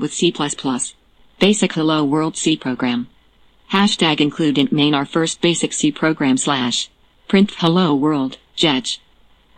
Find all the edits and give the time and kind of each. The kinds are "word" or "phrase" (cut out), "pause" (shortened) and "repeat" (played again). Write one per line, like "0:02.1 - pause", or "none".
none